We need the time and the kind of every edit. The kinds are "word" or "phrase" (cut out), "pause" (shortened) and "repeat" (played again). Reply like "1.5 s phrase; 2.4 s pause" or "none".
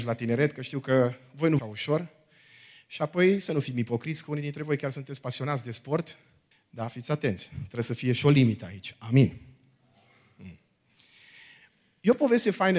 1.6 s phrase; 6.5 s pause